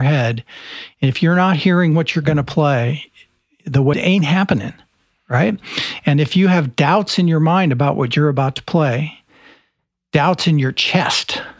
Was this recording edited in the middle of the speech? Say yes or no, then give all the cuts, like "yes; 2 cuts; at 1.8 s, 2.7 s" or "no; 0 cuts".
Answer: yes; 1 cut; at 3.9 s